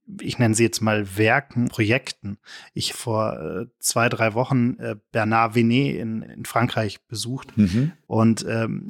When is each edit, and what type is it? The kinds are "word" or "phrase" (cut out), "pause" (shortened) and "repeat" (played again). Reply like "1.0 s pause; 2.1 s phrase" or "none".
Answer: 1.7 s word; 2.9 s word; 6.3 s word